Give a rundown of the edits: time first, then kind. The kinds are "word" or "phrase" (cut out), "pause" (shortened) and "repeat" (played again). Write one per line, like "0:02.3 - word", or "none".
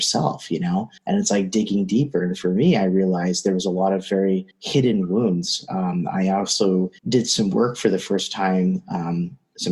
0:01.0 - pause
0:04.5 - pause
0:07.0 - pause